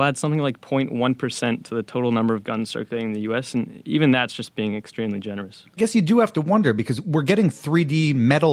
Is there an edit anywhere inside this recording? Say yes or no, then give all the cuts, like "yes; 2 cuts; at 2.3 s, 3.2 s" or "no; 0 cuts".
no; 0 cuts